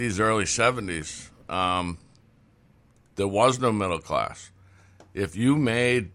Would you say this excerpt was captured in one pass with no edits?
yes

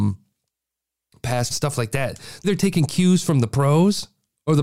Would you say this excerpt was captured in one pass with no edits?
no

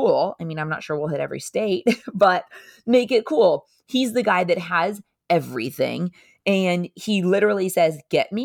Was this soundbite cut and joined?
no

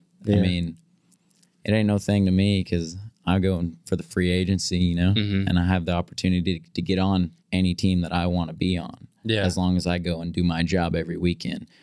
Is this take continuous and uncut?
no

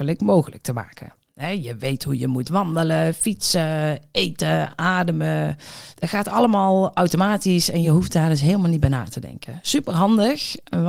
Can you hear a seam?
no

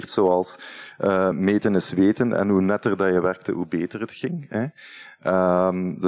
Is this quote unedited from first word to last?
yes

